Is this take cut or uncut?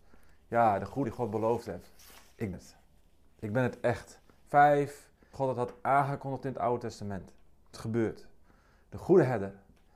cut